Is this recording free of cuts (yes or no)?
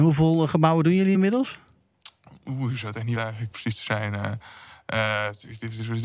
no